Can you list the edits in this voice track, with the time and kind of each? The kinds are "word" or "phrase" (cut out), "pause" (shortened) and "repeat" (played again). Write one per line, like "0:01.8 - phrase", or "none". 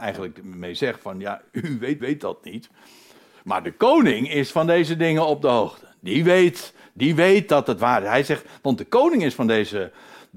0:02.0 - repeat